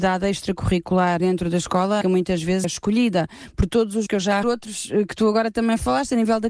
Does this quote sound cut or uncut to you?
cut